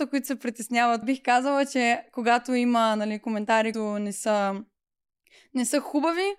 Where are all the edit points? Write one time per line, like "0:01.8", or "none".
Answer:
0:01.0
0:03.7